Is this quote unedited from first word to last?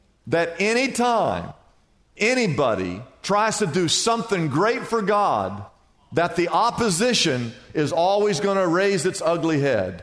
yes; 0 cuts

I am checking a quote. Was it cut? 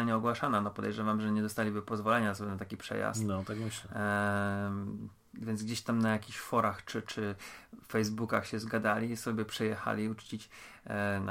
no; 0 cuts

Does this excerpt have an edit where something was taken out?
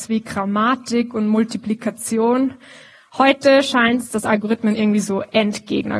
no; 0 cuts

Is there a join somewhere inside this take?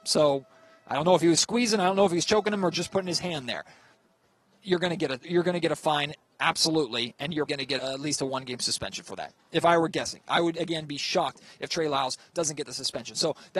yes; 3 cuts; at 5.2 s, 7.5 s, 7.8 s

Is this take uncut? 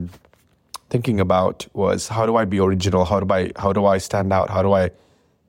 yes; 0 cuts

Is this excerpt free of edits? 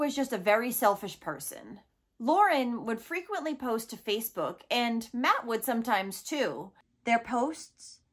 yes; 0 cuts

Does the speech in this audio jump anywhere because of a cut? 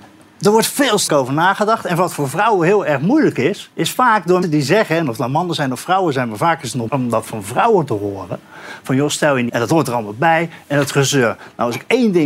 yes; 5 cuts; at 1.1 s, 3.7 s, 4.4 s, 6.9 s, 9.5 s

